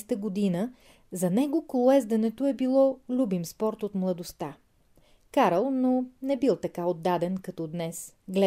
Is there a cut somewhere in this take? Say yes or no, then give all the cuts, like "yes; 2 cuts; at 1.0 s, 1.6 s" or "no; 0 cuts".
no; 0 cuts